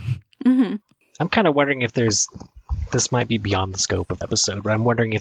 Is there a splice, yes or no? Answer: yes